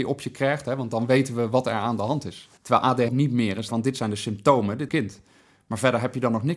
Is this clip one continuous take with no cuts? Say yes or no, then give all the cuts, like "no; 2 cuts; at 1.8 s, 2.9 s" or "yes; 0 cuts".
no; 4 cuts; at 2.6 s, 3.1 s, 3.7 s, 4.9 s